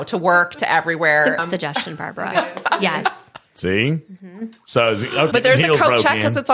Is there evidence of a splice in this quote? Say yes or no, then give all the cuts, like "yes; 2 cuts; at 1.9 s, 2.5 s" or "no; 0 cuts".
yes; 2 cuts; at 1.4 s, 5.3 s